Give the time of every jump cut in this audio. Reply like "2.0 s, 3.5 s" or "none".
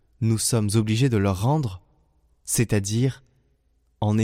none